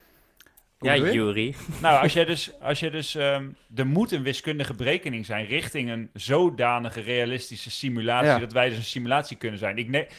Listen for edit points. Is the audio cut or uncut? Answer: uncut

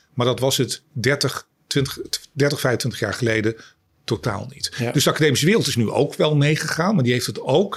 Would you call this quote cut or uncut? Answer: uncut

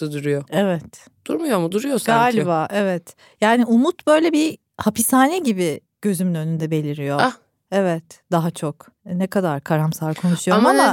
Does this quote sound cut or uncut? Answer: uncut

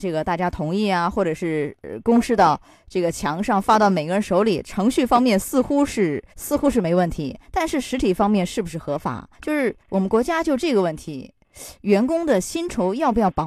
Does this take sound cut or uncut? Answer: cut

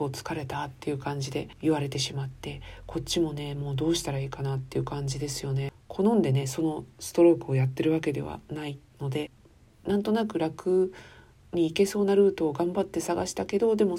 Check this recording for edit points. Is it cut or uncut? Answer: uncut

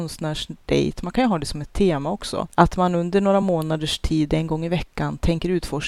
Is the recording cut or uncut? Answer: uncut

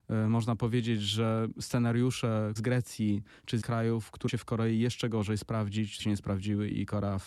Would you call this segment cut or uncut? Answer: cut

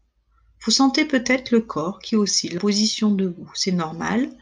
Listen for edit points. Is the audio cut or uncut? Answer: cut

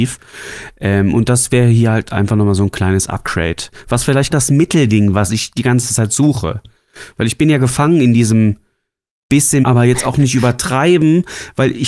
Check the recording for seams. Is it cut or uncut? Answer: cut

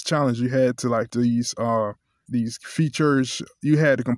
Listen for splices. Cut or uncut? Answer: cut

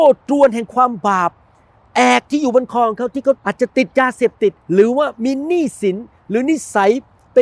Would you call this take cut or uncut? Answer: cut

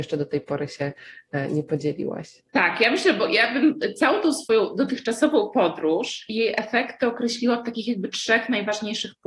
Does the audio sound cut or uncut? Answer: cut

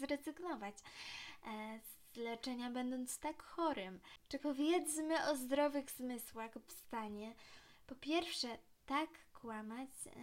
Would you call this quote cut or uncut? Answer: cut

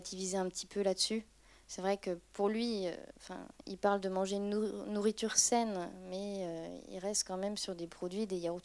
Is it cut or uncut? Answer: uncut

